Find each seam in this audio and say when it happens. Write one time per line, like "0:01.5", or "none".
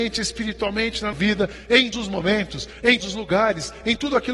0:01.1
0:01.9
0:03.0